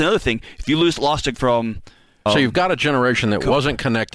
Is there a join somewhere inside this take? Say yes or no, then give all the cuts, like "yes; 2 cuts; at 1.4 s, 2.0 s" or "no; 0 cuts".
yes; 2 cuts; at 1.3 s, 2.3 s